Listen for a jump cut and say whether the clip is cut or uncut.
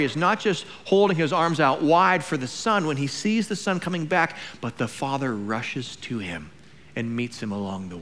uncut